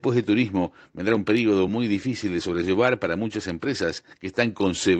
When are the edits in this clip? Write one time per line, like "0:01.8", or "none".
none